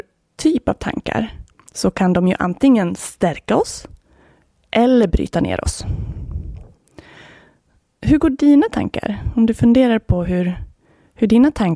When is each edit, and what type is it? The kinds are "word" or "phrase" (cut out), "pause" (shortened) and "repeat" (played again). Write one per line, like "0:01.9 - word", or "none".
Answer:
none